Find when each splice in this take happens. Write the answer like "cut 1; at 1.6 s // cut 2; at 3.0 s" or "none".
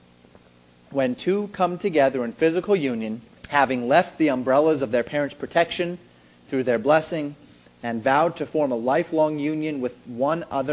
cut 1; at 3.4 s